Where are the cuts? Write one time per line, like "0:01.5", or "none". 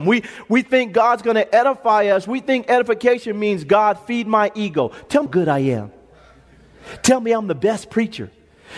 0:05.3